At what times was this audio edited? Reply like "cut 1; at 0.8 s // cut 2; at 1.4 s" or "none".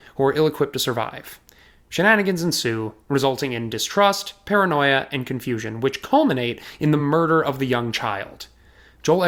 none